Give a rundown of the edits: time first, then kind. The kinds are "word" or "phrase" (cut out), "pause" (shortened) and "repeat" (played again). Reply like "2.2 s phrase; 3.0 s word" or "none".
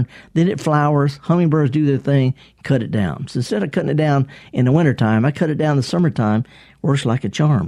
none